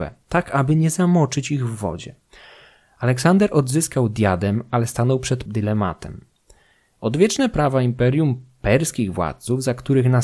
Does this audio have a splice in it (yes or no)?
yes